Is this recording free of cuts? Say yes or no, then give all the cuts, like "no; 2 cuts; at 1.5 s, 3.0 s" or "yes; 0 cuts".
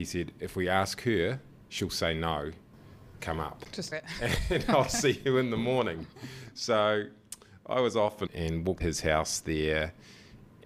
no; 4 cuts; at 3.2 s, 3.9 s, 8.3 s, 8.8 s